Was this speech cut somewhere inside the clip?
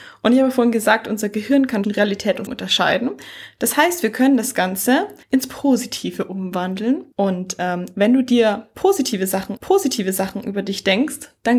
yes; 5 cuts; at 1.8 s, 2.5 s, 5.2 s, 7.1 s, 9.6 s

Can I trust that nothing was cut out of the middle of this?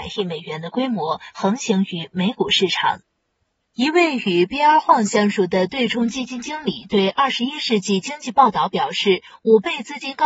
yes; 0 cuts

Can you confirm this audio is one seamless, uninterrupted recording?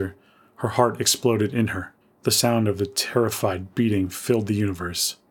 yes; 0 cuts

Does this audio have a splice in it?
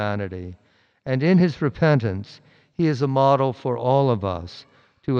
no; 0 cuts

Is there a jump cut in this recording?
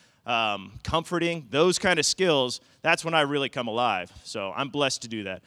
no; 0 cuts

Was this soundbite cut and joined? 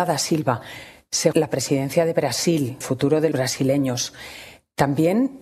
yes; 3 cuts; at 1.3 s, 2.8 s, 3.3 s

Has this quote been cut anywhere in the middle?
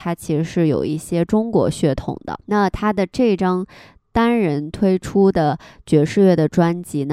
yes; 1 cut; at 2.4 s

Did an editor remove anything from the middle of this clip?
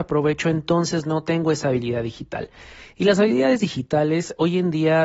no; 0 cuts

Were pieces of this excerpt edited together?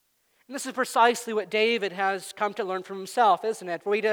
no; 0 cuts

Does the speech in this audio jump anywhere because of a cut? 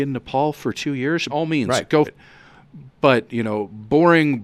yes; 2 cuts; at 1.3 s, 2.0 s

